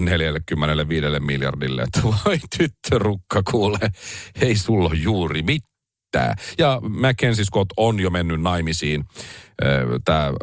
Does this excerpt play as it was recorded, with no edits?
yes; 0 cuts

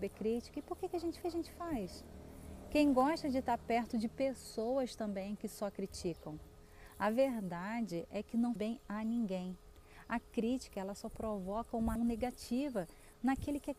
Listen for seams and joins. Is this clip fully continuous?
no; 3 cuts; at 1.2 s, 8.6 s, 12.0 s

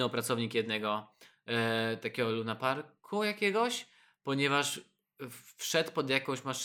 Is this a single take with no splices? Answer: yes; 0 cuts

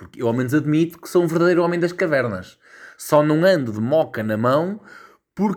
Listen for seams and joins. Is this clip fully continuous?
yes; 0 cuts

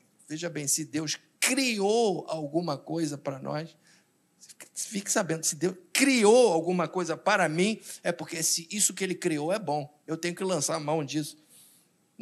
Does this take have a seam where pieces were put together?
no; 0 cuts

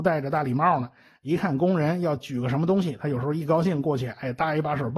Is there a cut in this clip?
no; 0 cuts

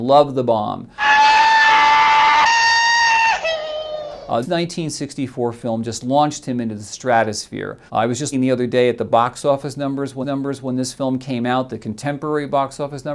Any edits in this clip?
yes; 4 cuts; at 4.4 s, 7.9 s, 8.3 s, 10.2 s

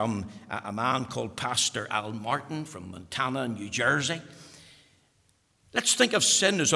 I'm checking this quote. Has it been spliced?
no; 0 cuts

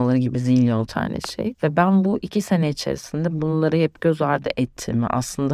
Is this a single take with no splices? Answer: yes; 0 cuts

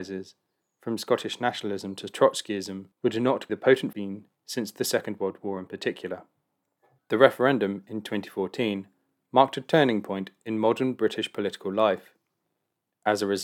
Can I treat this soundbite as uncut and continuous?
no; 4 cuts; at 2.9 s, 3.5 s, 3.9 s, 6.6 s

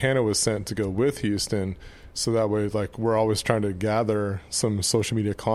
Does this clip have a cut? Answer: no; 0 cuts

